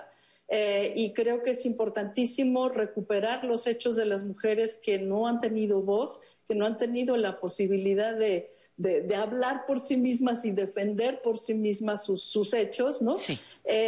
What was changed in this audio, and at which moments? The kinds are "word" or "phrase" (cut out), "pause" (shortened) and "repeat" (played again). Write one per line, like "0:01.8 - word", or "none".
none